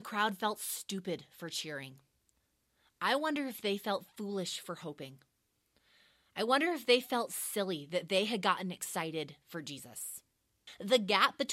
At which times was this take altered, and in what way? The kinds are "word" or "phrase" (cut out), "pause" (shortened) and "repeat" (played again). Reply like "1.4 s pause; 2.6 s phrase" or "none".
none